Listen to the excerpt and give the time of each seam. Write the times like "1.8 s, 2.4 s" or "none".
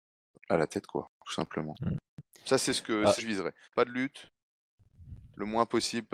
1.1 s, 3.2 s, 3.6 s